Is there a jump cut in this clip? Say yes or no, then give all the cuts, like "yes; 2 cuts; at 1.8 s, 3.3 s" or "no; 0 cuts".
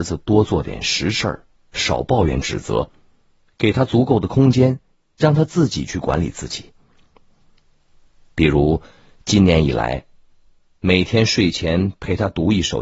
no; 0 cuts